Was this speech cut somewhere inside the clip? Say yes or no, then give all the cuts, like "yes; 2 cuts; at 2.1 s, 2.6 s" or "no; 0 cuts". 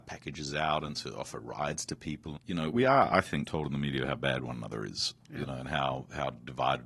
yes; 3 cuts; at 2.4 s, 2.7 s, 3.5 s